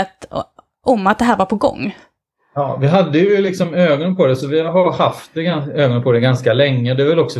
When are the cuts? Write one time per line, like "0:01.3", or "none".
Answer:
none